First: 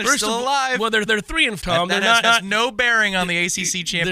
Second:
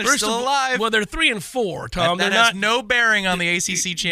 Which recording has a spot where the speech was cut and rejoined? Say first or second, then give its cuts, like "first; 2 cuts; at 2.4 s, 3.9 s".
first; 3 cuts; at 1.1 s, 1.6 s, 2.2 s